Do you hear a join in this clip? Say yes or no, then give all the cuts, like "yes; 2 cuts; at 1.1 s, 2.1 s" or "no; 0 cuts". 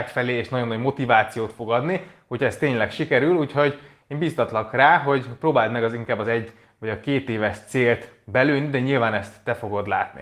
no; 0 cuts